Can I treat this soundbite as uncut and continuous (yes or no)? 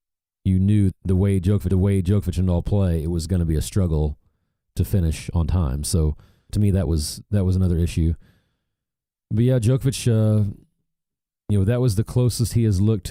no